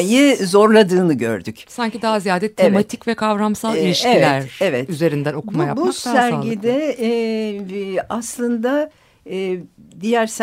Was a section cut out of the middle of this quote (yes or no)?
no